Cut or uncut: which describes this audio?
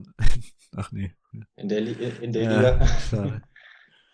cut